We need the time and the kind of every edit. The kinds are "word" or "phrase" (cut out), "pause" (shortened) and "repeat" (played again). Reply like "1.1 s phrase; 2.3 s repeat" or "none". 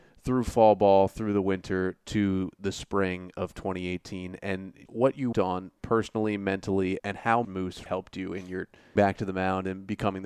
4.9 s word; 5.3 s word; 7.0 s word; 7.4 s word; 7.9 s word; 9.0 s word